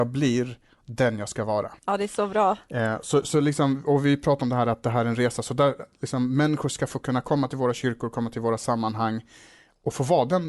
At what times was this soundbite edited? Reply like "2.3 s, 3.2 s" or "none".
1.8 s

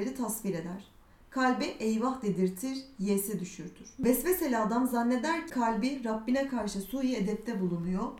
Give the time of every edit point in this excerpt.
5.5 s

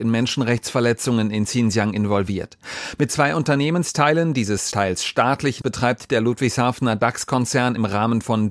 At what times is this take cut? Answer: 5.6 s

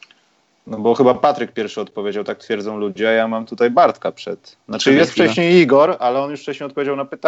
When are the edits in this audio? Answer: none

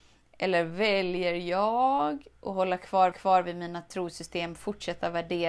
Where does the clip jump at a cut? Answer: 3.1 s

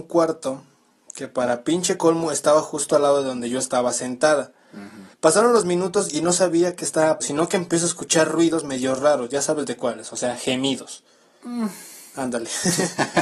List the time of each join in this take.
5.1 s, 7.2 s

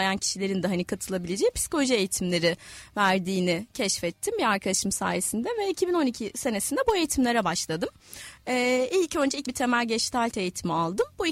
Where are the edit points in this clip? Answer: 9.4 s

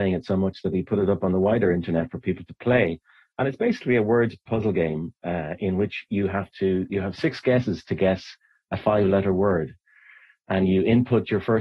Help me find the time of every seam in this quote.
none

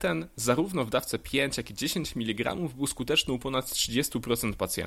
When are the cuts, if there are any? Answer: none

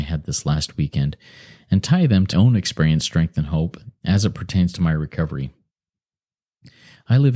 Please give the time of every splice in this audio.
2.3 s

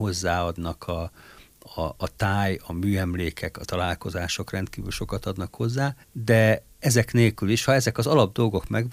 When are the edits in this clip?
3.6 s, 6.0 s, 7.7 s

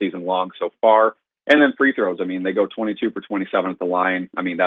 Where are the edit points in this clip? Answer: none

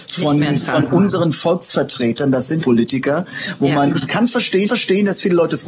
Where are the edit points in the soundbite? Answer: 2.6 s, 4.6 s

